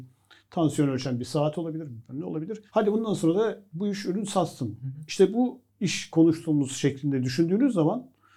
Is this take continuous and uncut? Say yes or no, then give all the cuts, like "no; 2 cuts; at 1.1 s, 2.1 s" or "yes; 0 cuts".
no; 2 cuts; at 2.7 s, 5.7 s